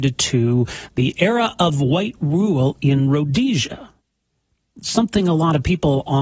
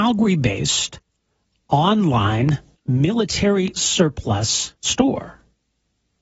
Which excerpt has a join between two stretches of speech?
second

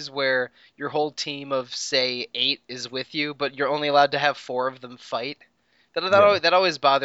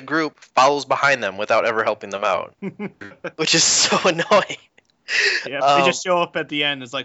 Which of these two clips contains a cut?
second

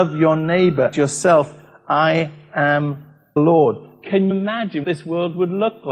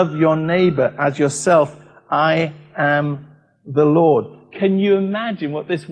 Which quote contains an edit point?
first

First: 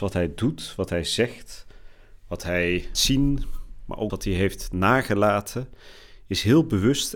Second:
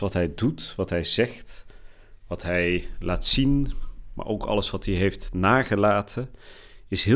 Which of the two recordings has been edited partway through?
first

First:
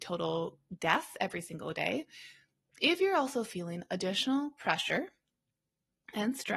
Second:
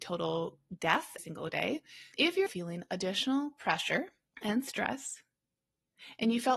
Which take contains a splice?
second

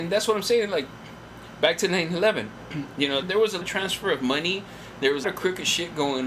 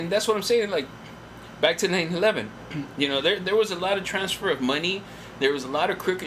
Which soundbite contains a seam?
first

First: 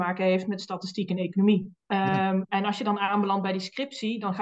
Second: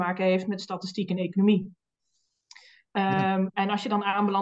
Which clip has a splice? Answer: first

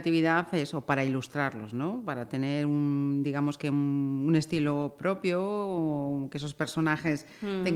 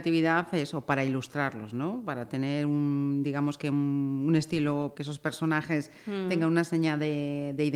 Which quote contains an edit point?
second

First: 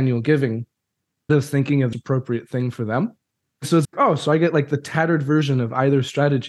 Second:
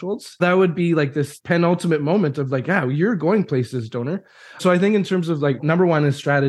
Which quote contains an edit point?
first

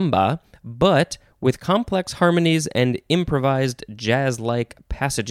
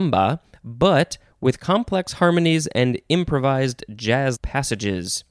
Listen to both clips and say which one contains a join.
second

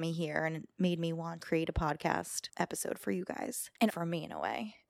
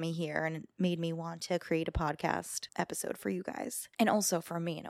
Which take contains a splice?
first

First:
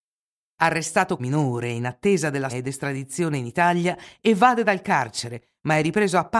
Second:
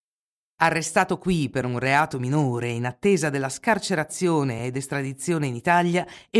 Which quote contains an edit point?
first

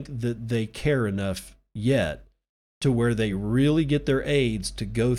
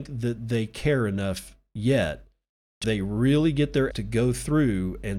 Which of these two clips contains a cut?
second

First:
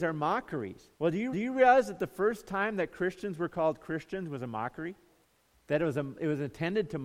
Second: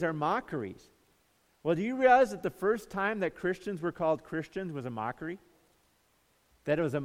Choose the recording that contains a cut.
first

